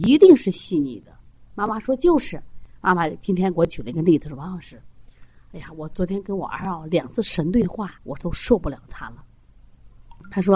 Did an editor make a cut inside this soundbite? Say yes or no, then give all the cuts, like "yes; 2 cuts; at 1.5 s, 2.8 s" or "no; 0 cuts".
yes; 2 cuts; at 1.2 s, 8.0 s